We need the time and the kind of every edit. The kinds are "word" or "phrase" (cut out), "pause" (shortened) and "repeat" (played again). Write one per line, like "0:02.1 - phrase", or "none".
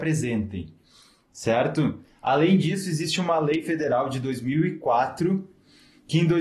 none